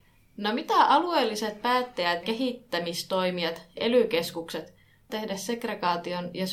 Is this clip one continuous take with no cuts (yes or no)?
no